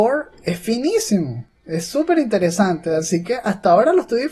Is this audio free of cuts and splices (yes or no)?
yes